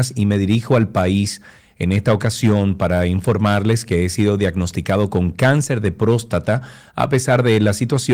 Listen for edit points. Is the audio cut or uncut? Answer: uncut